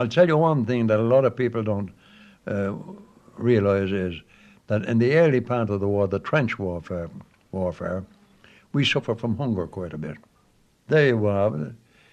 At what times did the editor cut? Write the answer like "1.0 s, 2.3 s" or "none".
none